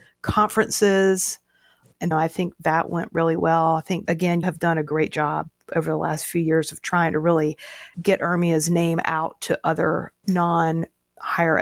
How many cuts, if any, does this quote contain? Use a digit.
2